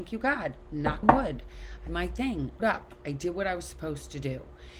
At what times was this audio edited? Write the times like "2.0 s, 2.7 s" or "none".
1.0 s, 1.9 s, 2.6 s